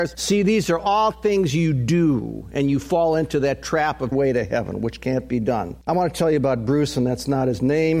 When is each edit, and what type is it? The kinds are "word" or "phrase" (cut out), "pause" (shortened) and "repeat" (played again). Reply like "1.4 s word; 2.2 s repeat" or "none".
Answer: 4.1 s phrase